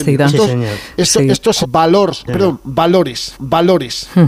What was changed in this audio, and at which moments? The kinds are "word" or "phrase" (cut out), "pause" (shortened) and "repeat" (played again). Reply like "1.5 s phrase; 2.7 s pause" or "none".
1.6 s phrase; 2.3 s word; 3.3 s repeat